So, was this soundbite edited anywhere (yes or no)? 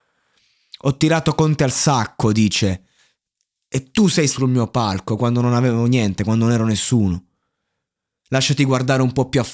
yes